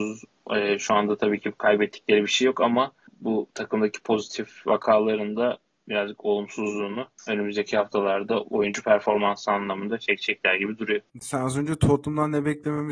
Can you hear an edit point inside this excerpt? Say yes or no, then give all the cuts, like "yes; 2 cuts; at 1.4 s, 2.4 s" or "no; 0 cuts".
yes; 1 cut; at 11.1 s